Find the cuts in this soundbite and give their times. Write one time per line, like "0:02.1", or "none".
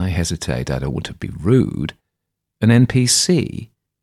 none